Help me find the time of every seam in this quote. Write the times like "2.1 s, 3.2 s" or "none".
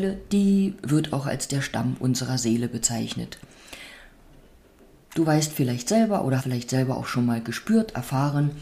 6.4 s